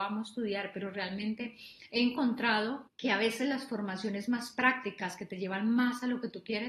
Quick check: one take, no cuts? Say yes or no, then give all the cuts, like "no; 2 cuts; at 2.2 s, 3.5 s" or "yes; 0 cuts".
no; 1 cut; at 2.9 s